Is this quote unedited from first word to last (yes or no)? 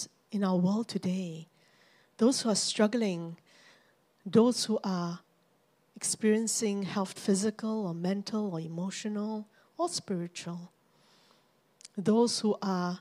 no